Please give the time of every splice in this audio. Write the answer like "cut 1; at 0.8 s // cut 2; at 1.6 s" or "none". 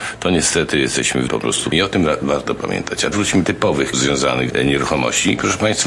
cut 1; at 1.3 s // cut 2; at 1.7 s // cut 3; at 3.1 s // cut 4; at 3.4 s // cut 5; at 3.9 s // cut 6; at 4.5 s